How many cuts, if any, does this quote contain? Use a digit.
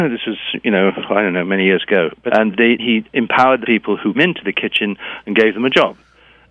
4